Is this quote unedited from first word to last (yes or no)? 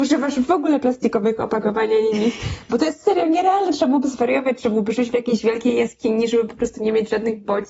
yes